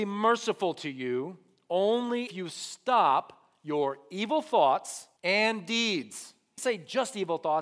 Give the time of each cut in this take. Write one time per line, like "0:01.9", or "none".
0:02.3
0:05.2
0:06.6